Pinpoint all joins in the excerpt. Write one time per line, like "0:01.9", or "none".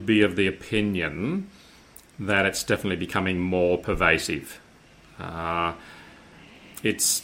none